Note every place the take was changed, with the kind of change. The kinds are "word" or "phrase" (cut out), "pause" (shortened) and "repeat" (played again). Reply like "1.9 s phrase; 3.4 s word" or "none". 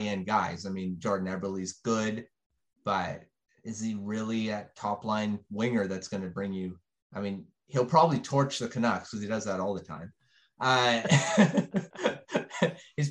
none

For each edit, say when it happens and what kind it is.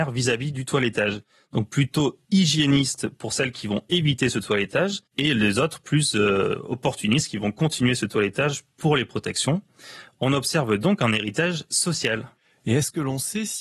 2.2 s pause; 5.1 s pause

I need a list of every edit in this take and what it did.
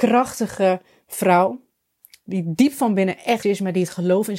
3.4 s word

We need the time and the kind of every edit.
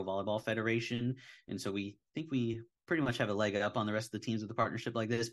none

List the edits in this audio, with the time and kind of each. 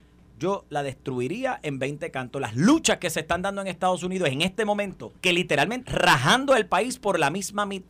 5.2 s pause; 5.8 s word

